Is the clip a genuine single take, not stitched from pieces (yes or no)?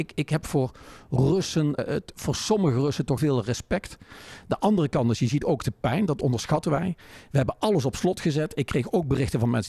no